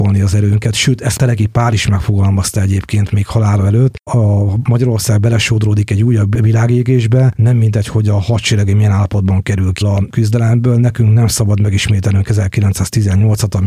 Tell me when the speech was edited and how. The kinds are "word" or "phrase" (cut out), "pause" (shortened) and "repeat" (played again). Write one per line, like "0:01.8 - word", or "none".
0:01.2 - word
0:04.1 - word
0:09.8 - word